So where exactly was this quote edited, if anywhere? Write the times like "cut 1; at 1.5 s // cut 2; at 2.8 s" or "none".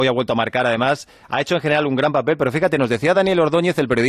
none